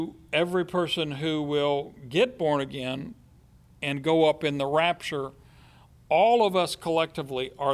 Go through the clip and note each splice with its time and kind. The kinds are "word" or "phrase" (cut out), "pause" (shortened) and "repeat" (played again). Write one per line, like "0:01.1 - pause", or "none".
none